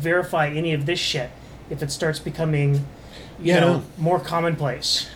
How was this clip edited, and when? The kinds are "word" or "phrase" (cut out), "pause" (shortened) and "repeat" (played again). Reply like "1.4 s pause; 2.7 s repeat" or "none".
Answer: none